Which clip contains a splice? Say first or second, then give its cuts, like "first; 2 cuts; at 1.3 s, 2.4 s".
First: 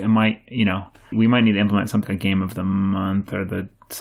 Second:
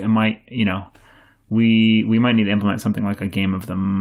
first; 2 cuts; at 1.1 s, 2.0 s